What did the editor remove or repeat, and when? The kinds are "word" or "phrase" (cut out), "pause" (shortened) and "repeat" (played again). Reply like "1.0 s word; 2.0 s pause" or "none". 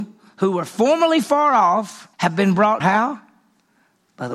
2.1 s pause; 2.8 s word